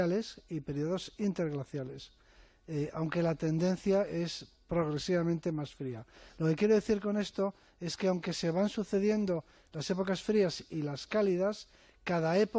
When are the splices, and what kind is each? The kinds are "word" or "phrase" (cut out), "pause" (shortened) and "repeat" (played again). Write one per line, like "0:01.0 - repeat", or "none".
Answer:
none